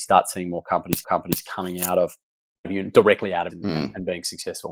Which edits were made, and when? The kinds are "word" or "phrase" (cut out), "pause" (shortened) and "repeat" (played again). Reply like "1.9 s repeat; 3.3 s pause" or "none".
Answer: 1.0 s repeat; 2.6 s word; 3.5 s word